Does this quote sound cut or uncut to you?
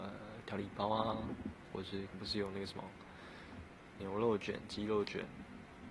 cut